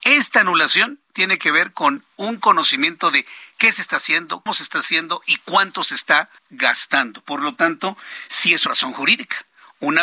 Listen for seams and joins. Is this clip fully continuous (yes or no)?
no